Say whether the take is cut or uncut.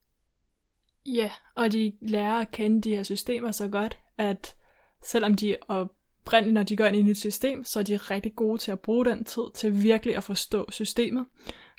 uncut